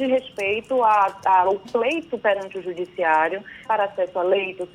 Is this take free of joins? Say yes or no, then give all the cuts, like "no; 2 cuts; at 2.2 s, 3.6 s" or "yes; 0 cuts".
no; 2 cuts; at 1.6 s, 3.6 s